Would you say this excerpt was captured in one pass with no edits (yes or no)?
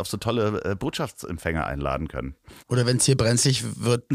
no